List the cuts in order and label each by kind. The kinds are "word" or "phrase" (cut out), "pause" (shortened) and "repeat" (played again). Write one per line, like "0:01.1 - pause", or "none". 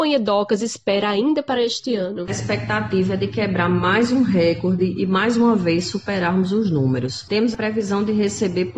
none

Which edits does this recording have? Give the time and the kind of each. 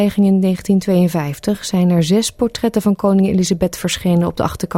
none

